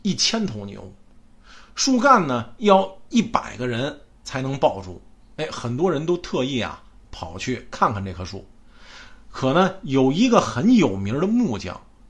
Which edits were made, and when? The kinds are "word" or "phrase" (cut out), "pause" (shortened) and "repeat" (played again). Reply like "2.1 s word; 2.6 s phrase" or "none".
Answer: none